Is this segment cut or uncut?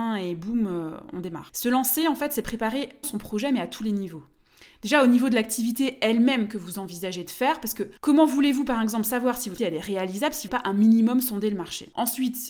cut